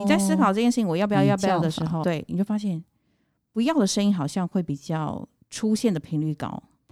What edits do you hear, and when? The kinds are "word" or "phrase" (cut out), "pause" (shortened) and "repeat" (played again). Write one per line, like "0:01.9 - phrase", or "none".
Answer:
0:02.0 - word